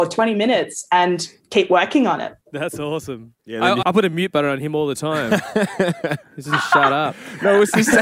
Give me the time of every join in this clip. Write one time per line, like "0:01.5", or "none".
0:02.4
0:03.4
0:03.8